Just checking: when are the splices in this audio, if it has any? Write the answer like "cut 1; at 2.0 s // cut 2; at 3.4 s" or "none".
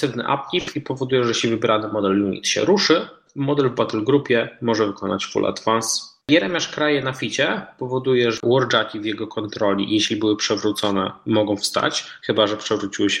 cut 1; at 8.4 s